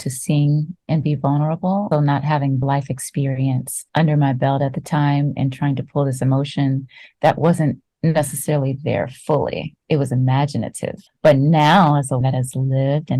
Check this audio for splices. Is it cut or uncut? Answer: cut